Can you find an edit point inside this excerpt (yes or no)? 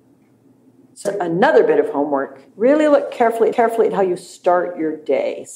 yes